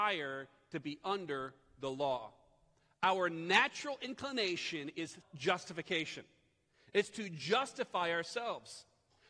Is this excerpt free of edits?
no; 1 cut; at 5.2 s

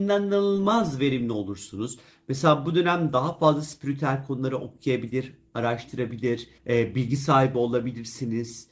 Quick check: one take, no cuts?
no; 1 cut; at 6.6 s

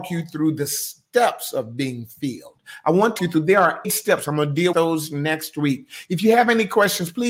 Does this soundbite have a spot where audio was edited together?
yes; 3 cuts; at 3.2 s, 3.8 s, 4.7 s

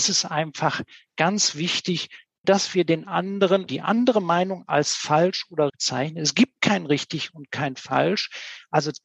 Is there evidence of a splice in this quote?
yes; 3 cuts; at 2.4 s, 3.7 s, 5.7 s

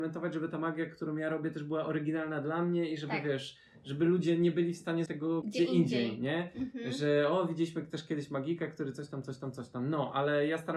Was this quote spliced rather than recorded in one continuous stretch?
yes; 2 cuts; at 5.1 s, 5.4 s

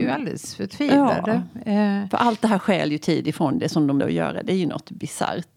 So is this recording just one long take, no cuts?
no; 1 cut; at 4.0 s

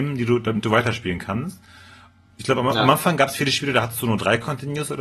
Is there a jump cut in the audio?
no; 0 cuts

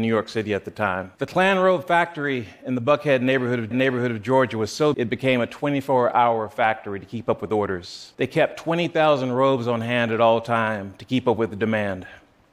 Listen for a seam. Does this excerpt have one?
yes; 4 cuts; at 1.1 s, 3.7 s, 4.9 s, 8.1 s

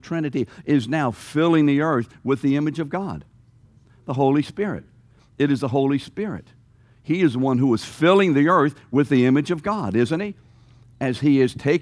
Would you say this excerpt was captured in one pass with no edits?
yes; 0 cuts

